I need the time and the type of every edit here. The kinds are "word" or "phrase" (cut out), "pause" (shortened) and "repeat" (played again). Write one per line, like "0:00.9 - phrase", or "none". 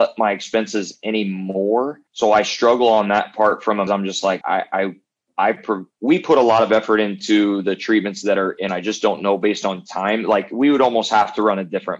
0:02.1 - pause
0:03.9 - phrase
0:04.4 - word
0:05.9 - pause
0:08.7 - phrase